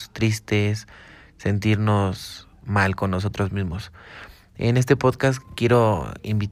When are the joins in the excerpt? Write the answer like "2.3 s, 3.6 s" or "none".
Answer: none